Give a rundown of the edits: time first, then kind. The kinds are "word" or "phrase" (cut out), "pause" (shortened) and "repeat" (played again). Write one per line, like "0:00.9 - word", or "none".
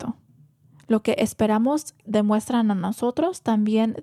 0:02.0 - word